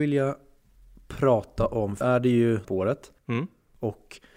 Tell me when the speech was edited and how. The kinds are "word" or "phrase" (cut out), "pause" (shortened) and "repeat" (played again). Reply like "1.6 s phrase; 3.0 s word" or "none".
2.0 s word; 2.6 s phrase